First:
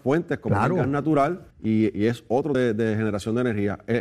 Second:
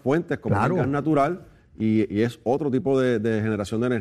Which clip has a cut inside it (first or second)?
first